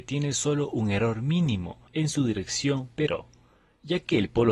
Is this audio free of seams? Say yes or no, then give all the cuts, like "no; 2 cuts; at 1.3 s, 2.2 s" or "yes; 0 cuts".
no; 2 cuts; at 1.9 s, 2.9 s